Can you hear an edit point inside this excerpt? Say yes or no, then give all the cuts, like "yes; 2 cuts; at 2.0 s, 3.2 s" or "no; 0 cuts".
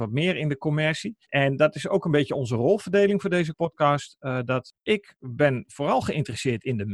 yes; 1 cut; at 1.2 s